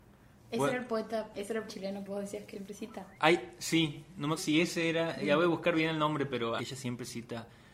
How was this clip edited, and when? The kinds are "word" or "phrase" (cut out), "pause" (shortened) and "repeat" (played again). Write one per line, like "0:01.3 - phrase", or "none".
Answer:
0:01.3 - word
0:01.7 - word
0:02.1 - word
0:02.5 - word
0:03.2 - pause
0:04.4 - word
0:06.6 - phrase